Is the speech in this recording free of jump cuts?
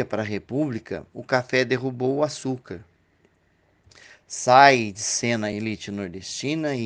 yes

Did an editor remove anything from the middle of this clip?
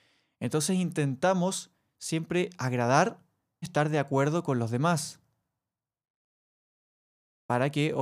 yes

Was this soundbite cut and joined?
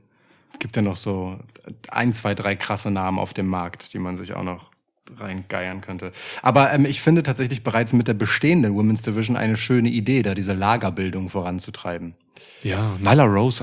no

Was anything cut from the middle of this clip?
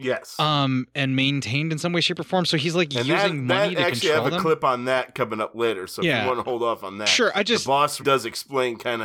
yes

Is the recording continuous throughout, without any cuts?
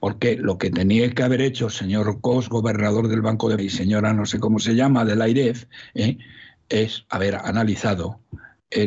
no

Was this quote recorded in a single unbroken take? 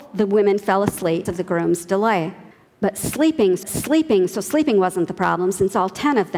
no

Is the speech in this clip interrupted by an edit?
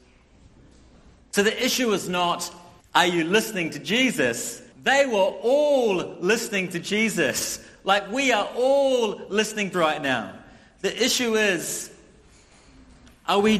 yes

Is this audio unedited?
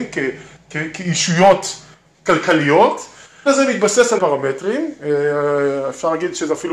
no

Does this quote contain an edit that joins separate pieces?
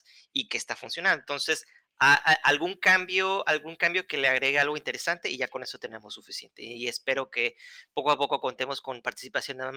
no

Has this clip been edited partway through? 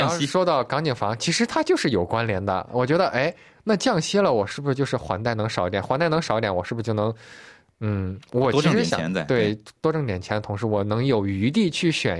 no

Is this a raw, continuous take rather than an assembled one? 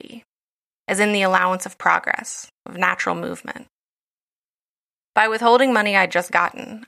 yes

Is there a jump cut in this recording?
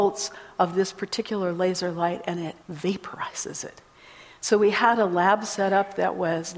yes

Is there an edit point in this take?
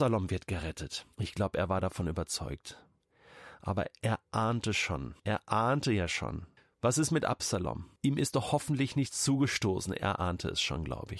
yes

